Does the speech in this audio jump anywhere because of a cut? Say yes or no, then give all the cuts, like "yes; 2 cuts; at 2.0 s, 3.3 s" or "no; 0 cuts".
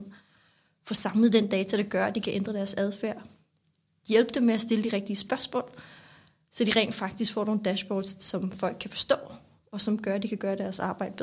no; 0 cuts